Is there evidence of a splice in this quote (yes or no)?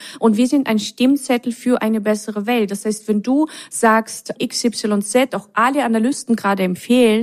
yes